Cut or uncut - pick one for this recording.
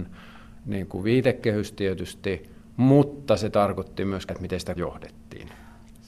cut